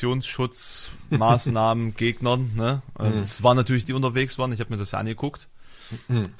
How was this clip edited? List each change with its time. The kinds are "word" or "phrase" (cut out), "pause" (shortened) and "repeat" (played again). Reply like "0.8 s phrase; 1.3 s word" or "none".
3.8 s word